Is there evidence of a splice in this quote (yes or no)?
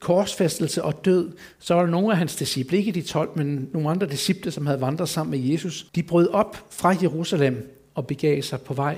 yes